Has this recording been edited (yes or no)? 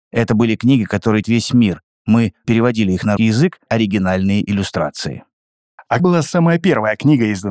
yes